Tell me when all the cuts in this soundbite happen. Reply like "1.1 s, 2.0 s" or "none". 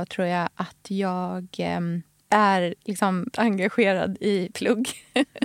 3.3 s, 4.5 s